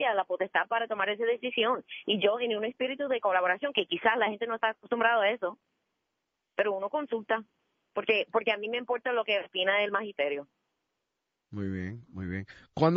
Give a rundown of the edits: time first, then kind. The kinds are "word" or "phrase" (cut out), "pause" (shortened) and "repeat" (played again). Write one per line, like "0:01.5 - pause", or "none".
none